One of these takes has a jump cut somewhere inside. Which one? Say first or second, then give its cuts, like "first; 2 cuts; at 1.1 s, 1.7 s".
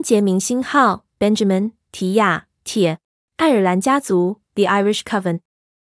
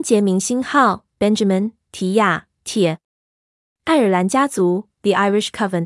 first; 1 cut; at 3.2 s